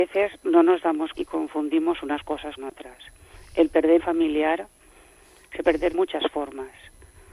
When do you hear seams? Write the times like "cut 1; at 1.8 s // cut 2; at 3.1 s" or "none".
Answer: cut 1; at 1.1 s // cut 2; at 2.6 s // cut 3; at 4.0 s // cut 4; at 5.6 s // cut 5; at 5.9 s